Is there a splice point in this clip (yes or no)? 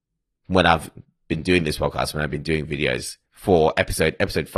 yes